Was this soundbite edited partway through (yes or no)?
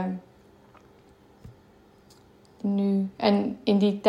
yes